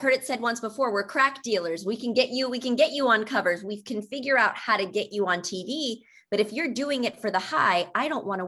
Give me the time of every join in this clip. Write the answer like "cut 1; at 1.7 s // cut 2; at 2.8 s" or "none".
none